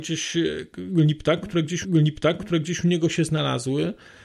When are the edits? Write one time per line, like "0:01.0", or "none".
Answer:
0:01.8